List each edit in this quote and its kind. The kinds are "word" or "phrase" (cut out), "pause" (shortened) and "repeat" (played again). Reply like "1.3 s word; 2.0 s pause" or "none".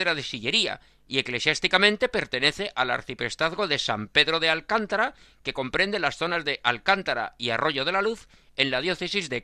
none